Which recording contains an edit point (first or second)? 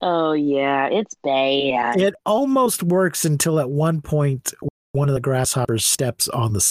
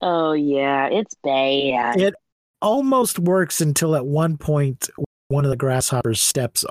first